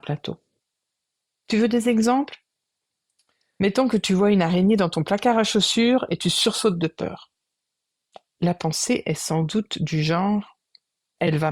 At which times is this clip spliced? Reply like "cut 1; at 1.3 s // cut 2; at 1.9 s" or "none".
none